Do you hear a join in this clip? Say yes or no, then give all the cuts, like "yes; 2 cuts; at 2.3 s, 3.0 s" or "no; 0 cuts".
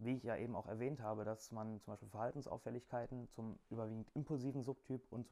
no; 0 cuts